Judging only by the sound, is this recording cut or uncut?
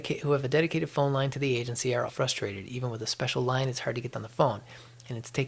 cut